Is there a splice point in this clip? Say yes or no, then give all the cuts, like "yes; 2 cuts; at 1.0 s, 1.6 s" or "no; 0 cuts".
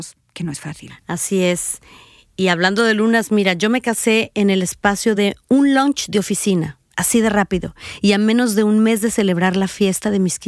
no; 0 cuts